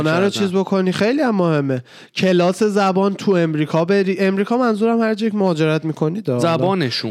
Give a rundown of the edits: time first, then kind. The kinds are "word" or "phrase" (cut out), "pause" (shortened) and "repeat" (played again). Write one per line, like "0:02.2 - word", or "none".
none